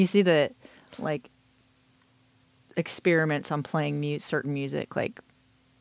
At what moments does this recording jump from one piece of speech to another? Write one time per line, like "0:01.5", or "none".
none